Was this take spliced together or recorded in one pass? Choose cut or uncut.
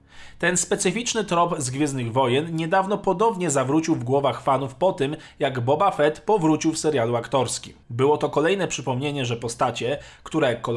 cut